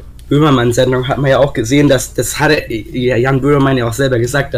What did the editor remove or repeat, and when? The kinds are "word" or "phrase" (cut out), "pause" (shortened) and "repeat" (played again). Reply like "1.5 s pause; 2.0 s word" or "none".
none